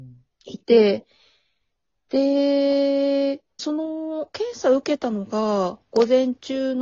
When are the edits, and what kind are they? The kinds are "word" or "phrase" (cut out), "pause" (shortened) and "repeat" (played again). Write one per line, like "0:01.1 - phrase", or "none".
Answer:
0:03.6 - phrase